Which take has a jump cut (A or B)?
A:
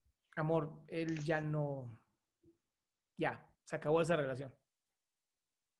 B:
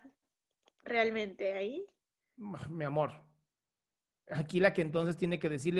A